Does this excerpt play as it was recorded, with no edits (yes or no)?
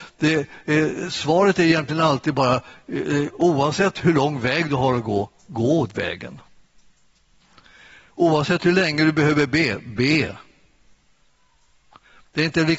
yes